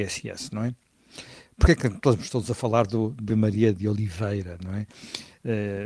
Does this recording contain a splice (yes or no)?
yes